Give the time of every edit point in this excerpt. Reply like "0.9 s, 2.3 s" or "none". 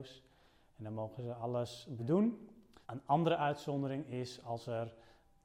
2.0 s, 2.8 s